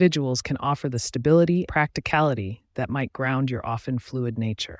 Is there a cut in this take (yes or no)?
yes